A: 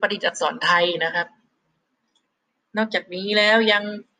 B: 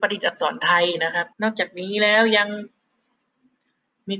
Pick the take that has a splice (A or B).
B